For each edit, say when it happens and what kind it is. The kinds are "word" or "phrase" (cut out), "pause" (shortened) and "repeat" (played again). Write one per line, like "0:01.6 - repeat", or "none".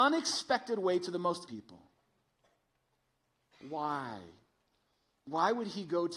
0:01.5 - word

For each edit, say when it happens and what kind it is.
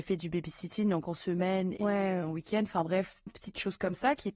0:03.3 - word

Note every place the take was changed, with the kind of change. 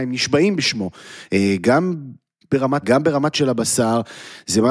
0:02.8 - word
0:03.3 - word

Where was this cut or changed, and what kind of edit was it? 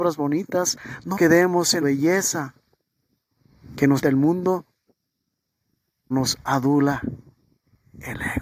0:01.1 - word
0:01.8 - word
0:04.0 - word
0:06.1 - word

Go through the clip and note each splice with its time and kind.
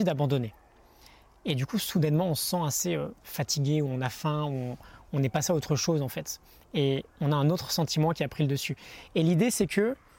0:03.2 - pause
0:07.1 - pause

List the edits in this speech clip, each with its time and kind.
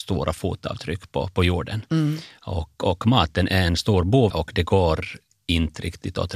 0:04.3 - phrase

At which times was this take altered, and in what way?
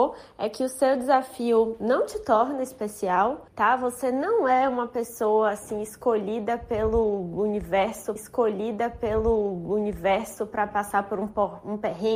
0:03.5 - pause
0:08.2 - repeat

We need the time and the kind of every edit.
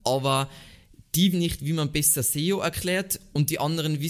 0:01.3 - word

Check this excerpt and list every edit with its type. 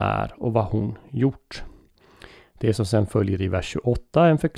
none

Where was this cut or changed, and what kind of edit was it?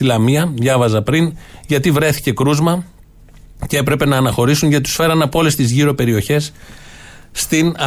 none

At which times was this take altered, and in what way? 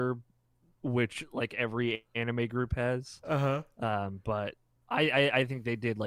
none

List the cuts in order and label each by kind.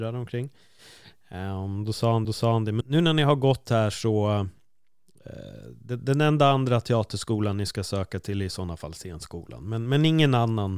0:02.2 - repeat
0:02.8 - word

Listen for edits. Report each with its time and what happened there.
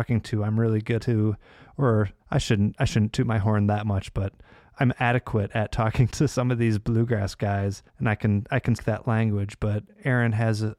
0:01.0 - phrase
0:02.2 - pause
0:03.4 - word
0:06.1 - word
0:07.9 - pause
0:08.8 - word

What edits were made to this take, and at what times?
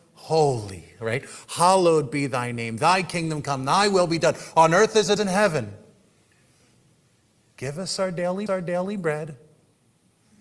0:05.2 - word
0:08.5 - repeat

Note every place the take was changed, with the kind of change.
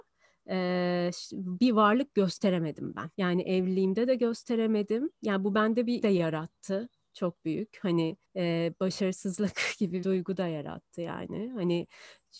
0:03.1 - pause
0:06.0 - word
0:08.2 - pause
0:10.0 - word

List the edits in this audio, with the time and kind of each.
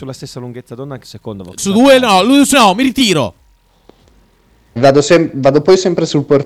0:01.0 - word
0:01.6 - word
0:02.5 - word
0:04.8 - word

